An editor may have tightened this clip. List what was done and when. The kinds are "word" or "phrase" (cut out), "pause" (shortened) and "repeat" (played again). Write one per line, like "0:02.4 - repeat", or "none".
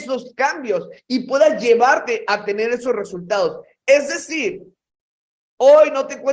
none

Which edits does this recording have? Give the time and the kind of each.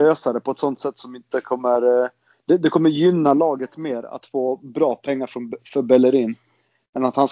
none

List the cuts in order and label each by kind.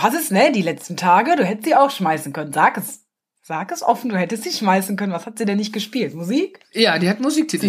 none

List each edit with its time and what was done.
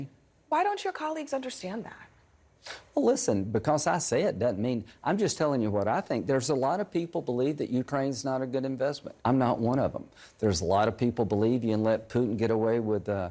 0:09.2 - pause

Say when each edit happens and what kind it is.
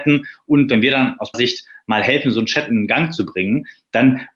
0:01.3 - word

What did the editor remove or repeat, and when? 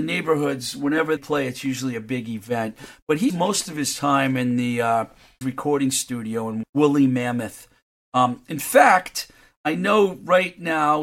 0:01.2 - word
0:03.3 - word
0:05.4 - word
0:06.6 - word

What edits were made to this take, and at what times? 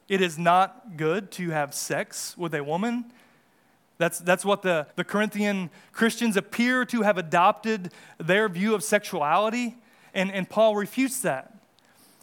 0:04.9 - pause

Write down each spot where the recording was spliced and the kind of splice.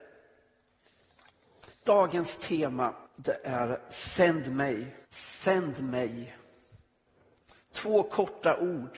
0:01.7 - pause
0:03.1 - pause
0:05.0 - pause

